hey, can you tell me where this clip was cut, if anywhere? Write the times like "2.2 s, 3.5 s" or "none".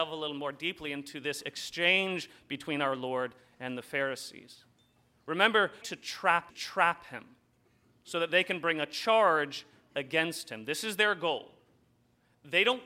5.8 s, 6.5 s